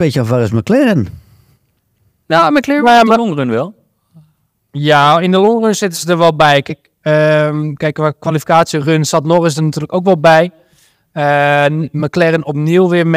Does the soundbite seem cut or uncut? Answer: uncut